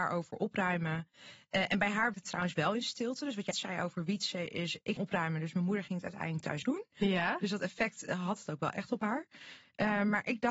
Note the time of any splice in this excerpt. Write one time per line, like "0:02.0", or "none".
0:02.1
0:03.5
0:05.0
0:06.6

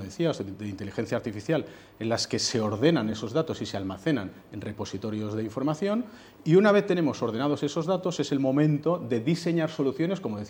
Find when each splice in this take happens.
none

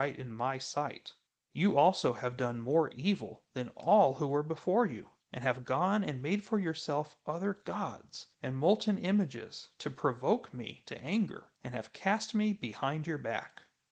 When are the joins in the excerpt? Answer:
0:01.3
0:05.2
0:08.3
0:11.5

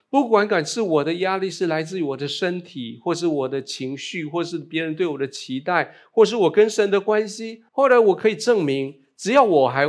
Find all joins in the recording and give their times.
0:07.7

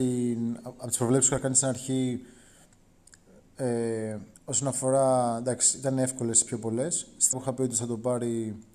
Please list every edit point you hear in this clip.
0:04.3
0:07.3
0:07.7

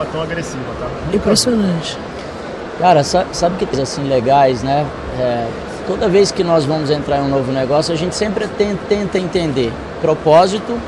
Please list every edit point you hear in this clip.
0:03.7
0:08.8

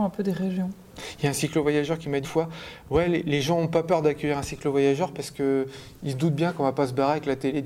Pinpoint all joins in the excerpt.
0:02.2

